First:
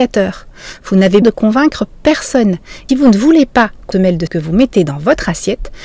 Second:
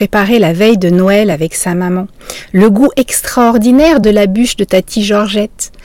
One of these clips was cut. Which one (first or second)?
first